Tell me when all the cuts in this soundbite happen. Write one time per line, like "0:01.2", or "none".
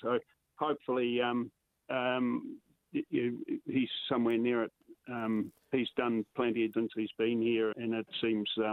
0:06.7
0:07.7